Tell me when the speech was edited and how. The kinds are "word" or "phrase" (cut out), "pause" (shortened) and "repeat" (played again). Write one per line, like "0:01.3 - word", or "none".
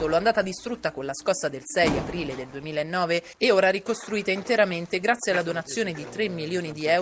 none